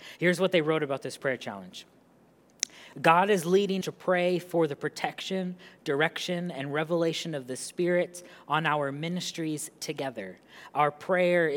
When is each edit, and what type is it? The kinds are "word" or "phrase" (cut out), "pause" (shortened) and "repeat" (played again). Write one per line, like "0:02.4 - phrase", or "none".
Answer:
0:03.8 - word